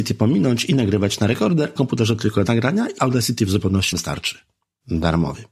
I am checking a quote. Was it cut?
yes; 4 cuts; at 1.8 s, 2.5 s, 3.0 s, 3.9 s

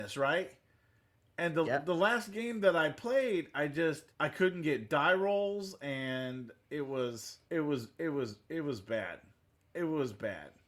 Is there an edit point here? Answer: yes; 2 cuts; at 4.1 s, 7.5 s

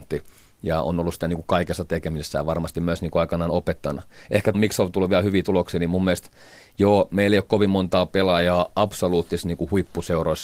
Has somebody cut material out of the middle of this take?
yes; 1 cut; at 4.5 s

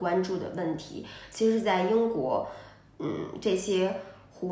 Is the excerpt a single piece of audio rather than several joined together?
yes; 0 cuts

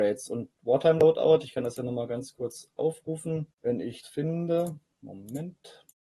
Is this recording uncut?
no; 2 cuts; at 3.5 s, 4.0 s

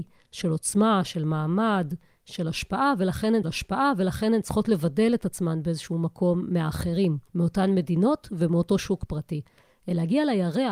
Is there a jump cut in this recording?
yes; 2 cuts; at 3.4 s, 7.3 s

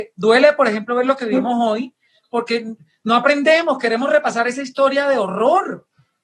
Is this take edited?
no; 0 cuts

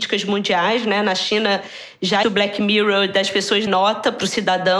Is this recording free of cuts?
no; 2 cuts; at 2.2 s, 3.7 s

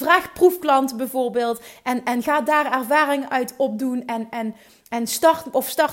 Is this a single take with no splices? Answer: yes; 0 cuts

